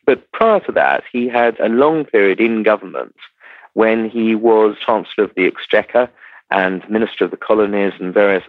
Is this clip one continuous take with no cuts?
no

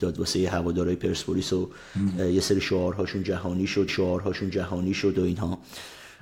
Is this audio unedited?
no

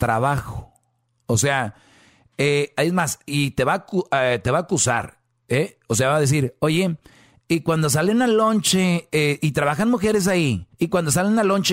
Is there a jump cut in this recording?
yes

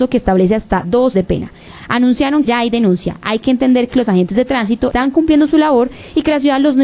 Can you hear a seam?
yes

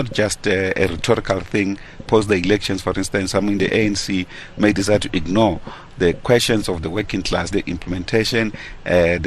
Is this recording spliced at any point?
yes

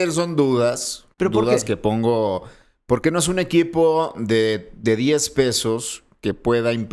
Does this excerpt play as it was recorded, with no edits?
no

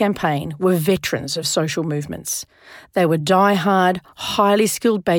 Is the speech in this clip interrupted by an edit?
no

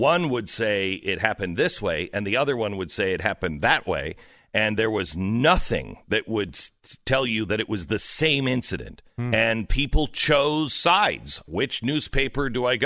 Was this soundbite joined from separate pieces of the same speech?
yes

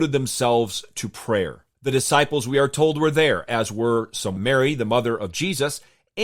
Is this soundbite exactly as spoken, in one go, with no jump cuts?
no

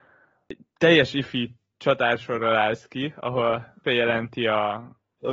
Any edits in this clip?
yes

